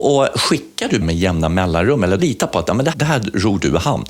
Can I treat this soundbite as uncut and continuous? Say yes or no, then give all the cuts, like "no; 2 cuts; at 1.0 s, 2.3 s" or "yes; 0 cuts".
no; 3 cuts; at 1.0 s, 2.2 s, 2.9 s